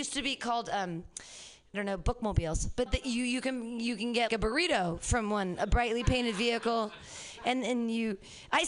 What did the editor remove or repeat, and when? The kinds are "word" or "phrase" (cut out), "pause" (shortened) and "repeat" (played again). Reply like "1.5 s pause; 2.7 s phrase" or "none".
1.7 s word; 2.9 s word; 4.3 s word

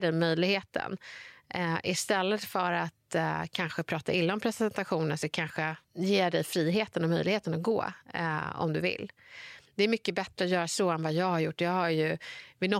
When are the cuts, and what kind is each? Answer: 5.8 s pause

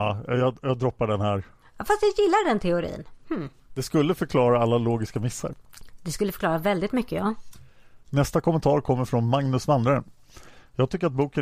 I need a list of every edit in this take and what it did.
none

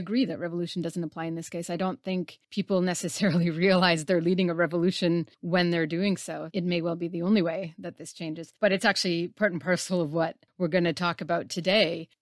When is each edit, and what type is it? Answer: 2.4 s pause; 5.3 s pause; 8.6 s pause

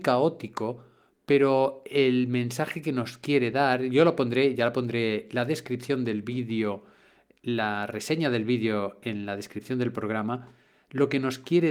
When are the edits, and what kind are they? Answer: none

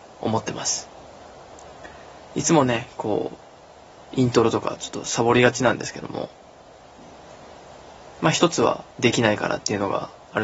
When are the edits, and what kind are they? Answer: 8.9 s pause

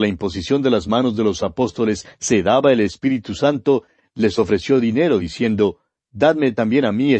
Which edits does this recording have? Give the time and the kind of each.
none

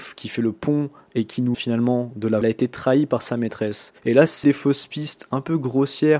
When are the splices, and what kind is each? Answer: 1.5 s phrase; 2.4 s phrase; 4.0 s pause; 4.4 s word

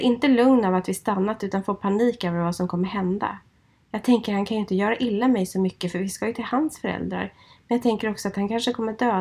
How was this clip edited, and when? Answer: none

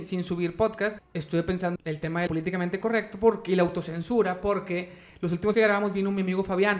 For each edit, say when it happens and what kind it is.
1.0 s word; 1.8 s word; 2.3 s word; 5.5 s word

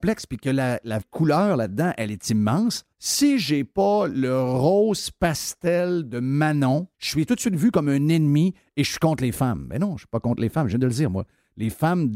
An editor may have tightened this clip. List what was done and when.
1.0 s word; 2.9 s pause; 6.9 s pause; 7.3 s phrase

